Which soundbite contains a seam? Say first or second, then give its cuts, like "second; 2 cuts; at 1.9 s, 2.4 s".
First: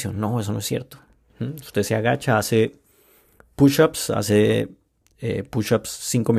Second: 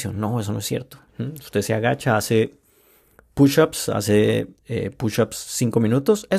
second; 2 cuts; at 1.1 s, 4.5 s